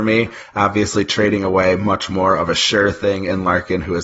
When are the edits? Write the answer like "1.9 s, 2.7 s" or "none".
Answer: none